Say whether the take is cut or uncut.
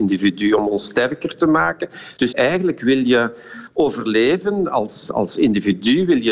cut